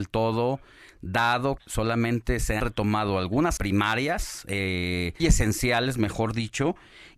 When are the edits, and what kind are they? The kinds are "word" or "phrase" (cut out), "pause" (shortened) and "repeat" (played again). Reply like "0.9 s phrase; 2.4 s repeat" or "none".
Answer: 1.6 s word; 2.6 s word; 3.6 s word; 5.2 s word